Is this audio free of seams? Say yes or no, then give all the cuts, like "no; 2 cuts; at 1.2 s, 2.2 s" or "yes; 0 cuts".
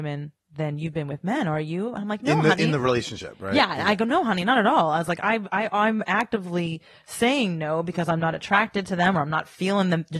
yes; 0 cuts